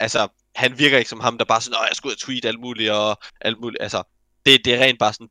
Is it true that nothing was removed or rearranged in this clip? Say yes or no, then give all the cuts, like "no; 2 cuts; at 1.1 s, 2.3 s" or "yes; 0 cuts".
yes; 0 cuts